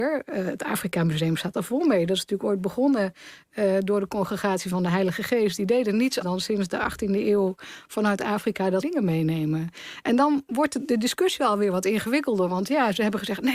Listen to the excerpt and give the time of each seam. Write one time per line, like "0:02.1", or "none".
0:06.2
0:08.8